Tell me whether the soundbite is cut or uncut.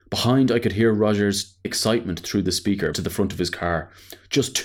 cut